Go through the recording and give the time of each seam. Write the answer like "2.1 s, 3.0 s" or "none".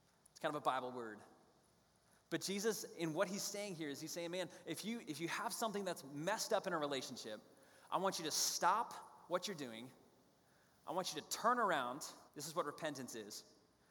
12.3 s

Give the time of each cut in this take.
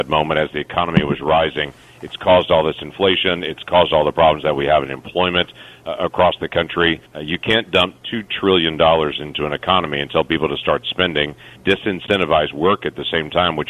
7.1 s, 11.6 s

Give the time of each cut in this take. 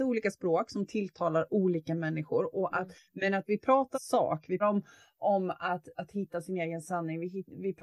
3.9 s, 4.6 s

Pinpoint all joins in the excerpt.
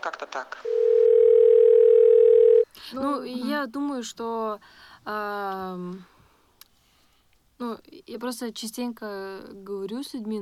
none

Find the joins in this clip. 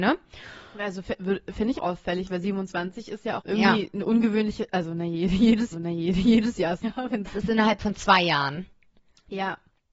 1.7 s, 3.4 s, 5.7 s, 6.8 s, 7.3 s

